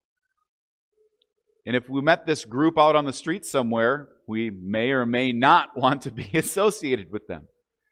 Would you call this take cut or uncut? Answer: uncut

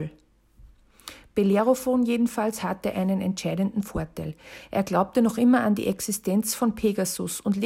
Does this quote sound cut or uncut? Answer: uncut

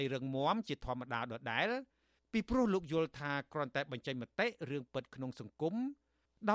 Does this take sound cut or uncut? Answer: uncut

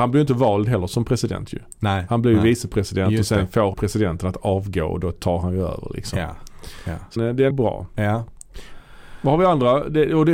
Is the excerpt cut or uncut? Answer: cut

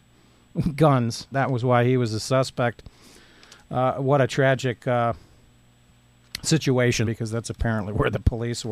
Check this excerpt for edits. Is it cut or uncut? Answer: cut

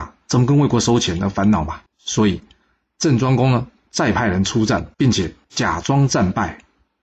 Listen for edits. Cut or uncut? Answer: cut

